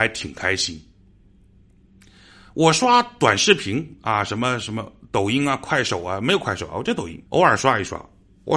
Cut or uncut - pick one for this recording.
cut